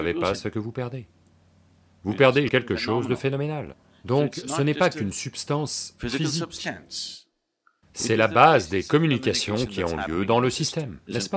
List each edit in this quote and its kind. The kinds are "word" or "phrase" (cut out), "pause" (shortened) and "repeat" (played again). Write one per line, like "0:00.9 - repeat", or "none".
0:02.5 - word